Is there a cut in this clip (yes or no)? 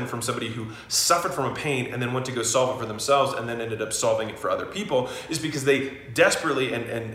no